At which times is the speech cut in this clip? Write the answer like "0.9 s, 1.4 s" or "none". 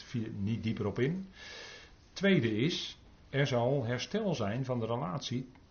none